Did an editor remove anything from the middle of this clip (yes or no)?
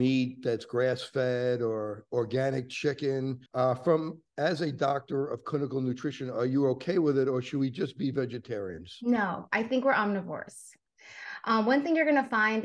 yes